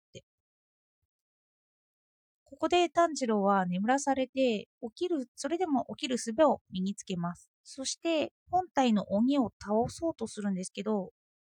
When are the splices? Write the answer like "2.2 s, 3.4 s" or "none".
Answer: 4.7 s, 7.5 s, 8.4 s